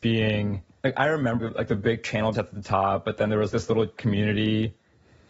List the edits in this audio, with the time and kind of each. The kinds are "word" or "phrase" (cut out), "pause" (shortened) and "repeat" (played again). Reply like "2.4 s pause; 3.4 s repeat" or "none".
1.4 s word; 2.3 s word; 3.5 s word; 4.0 s word